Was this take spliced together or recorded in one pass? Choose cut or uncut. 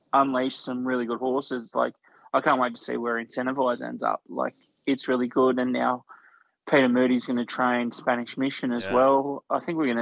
uncut